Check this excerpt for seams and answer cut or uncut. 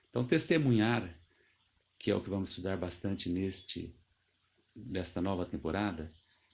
uncut